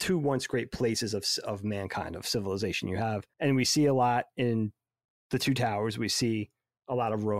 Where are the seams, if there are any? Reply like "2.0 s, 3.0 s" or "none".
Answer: 3.3 s